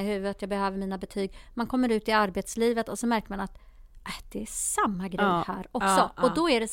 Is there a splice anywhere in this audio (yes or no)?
no